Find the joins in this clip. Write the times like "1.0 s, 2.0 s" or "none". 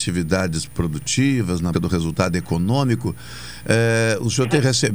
1.7 s